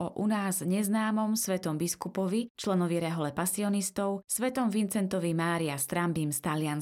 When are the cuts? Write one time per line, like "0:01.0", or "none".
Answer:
none